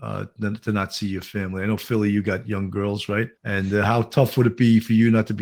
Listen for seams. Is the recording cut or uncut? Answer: cut